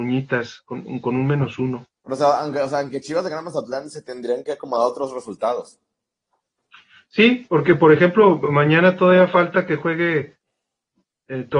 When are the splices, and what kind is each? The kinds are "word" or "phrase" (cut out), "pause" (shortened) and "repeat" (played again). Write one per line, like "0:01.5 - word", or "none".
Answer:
none